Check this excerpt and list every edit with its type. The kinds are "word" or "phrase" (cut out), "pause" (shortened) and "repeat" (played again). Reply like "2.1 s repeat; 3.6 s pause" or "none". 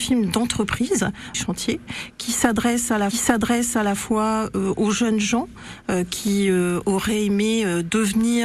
1.3 s phrase; 3.1 s repeat